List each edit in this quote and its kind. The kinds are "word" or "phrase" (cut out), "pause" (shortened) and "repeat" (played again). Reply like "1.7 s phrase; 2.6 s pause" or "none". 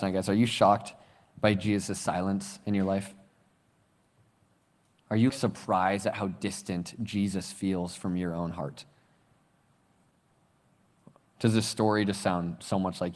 5.3 s word